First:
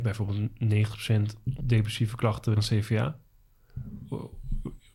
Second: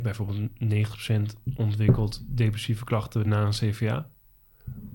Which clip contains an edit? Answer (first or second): first